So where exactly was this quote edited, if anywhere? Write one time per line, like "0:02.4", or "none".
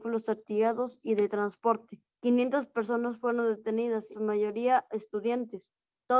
0:02.1
0:04.1